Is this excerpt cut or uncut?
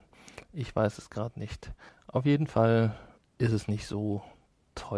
uncut